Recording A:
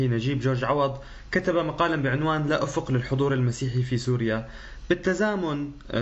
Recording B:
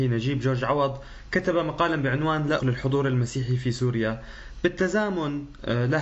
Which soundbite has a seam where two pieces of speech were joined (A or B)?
B